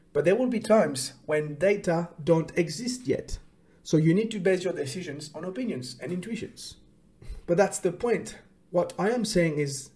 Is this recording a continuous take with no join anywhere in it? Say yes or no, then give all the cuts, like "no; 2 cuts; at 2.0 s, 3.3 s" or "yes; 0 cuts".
yes; 0 cuts